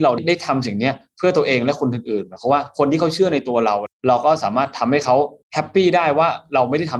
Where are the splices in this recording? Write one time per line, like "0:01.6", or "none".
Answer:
0:05.4